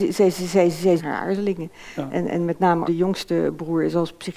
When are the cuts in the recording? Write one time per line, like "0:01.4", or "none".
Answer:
0:01.0
0:02.1
0:02.8